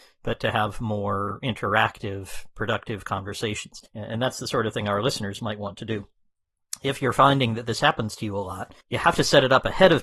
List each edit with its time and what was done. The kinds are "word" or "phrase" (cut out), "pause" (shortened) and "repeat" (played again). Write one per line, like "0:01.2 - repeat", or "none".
0:03.9 - pause
0:08.8 - pause